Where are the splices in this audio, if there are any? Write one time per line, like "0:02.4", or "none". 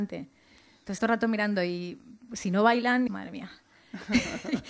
0:01.0
0:03.1